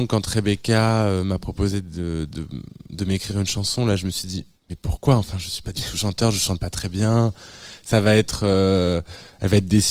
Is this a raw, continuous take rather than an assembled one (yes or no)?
no